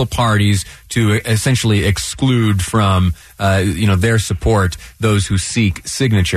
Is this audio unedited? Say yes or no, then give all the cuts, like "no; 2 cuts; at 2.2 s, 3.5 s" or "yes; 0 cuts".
yes; 0 cuts